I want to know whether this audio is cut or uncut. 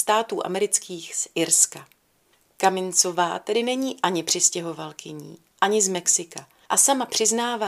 uncut